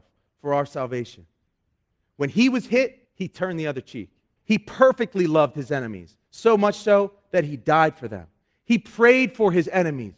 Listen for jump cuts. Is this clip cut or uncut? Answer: cut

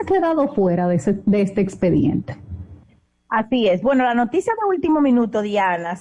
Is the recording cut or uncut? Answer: uncut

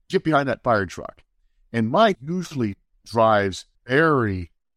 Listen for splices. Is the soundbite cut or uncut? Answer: cut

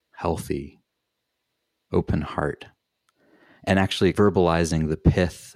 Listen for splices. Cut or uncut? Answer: uncut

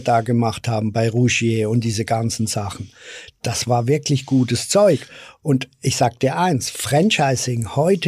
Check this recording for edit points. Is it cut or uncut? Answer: uncut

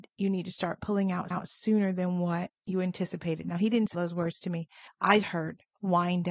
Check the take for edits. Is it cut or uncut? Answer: cut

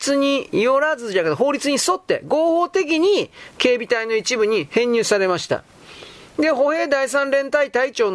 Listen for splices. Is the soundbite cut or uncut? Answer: uncut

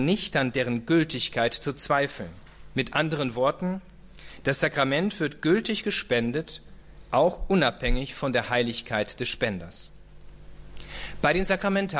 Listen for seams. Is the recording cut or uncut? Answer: uncut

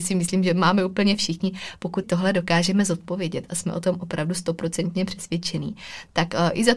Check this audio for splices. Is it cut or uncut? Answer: cut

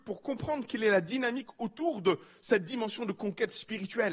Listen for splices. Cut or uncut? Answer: uncut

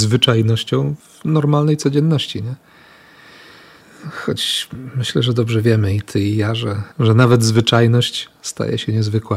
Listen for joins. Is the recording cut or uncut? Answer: cut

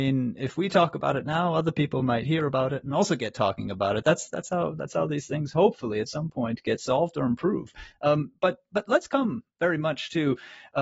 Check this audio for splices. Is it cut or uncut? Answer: uncut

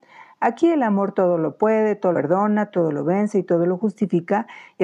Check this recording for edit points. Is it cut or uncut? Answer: cut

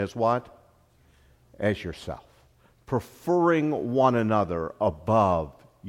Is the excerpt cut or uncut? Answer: uncut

